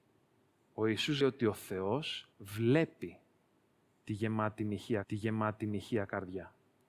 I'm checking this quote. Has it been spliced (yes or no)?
yes